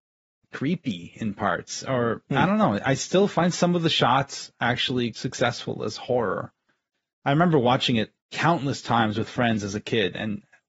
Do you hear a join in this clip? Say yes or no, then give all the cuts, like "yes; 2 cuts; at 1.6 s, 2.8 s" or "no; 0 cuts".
yes; 1 cut; at 5.1 s